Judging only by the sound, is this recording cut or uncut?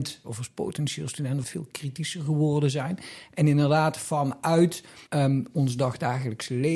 cut